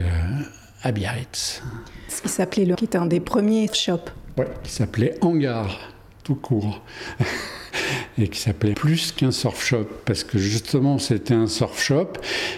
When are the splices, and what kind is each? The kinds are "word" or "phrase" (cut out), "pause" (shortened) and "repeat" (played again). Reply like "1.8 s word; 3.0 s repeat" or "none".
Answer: 2.7 s word; 3.7 s word; 8.7 s word